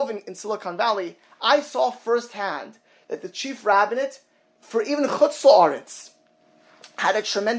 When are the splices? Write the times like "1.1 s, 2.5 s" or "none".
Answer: none